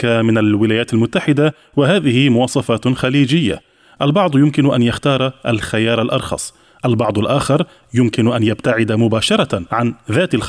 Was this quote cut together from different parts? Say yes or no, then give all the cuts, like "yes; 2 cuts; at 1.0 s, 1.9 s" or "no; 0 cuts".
no; 0 cuts